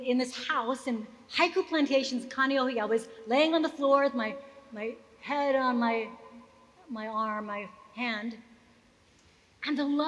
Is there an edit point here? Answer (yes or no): no